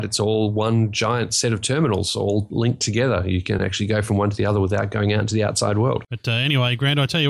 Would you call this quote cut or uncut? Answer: uncut